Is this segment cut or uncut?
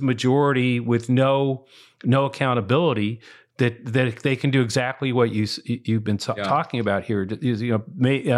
uncut